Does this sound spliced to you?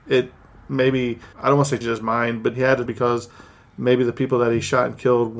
yes; 4 cuts; at 1.3 s, 1.8 s, 2.5 s, 2.9 s

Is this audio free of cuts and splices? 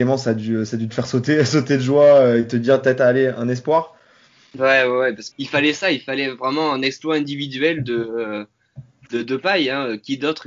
no; 1 cut; at 5.3 s

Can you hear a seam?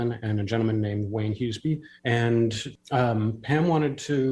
yes; 1 cut; at 2.0 s

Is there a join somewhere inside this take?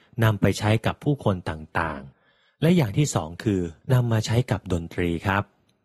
yes; 2 cuts; at 2.1 s, 3.8 s

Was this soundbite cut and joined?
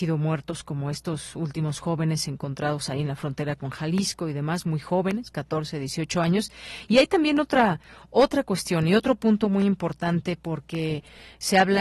no; 0 cuts

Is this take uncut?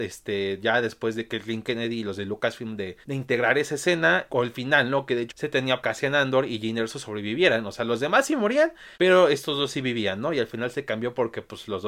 no; 5 cuts; at 3.0 s, 4.3 s, 5.3 s, 5.8 s, 8.9 s

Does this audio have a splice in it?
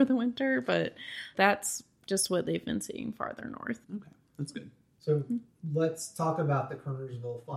yes; 2 cuts; at 1.3 s, 3.8 s

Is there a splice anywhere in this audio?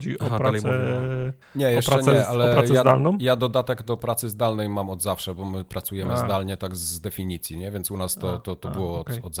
yes; 1 cut; at 1.4 s

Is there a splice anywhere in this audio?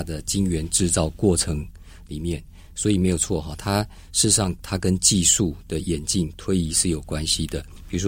no; 0 cuts

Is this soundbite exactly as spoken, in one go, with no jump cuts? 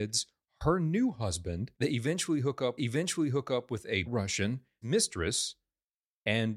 no; 4 cuts; at 1.7 s, 2.8 s, 4.1 s, 4.8 s

